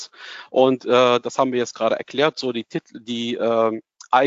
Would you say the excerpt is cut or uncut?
uncut